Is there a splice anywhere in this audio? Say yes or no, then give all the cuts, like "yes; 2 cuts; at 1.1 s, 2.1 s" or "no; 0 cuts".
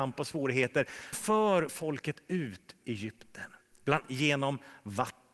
yes; 4 cuts; at 1.1 s, 1.7 s, 2.8 s, 4.0 s